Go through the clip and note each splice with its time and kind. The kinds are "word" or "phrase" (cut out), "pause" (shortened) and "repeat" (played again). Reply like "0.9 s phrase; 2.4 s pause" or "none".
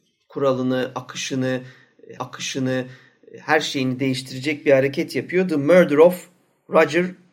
2.2 s repeat